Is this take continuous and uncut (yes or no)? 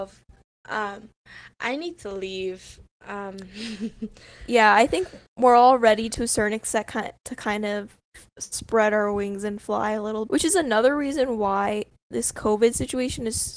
no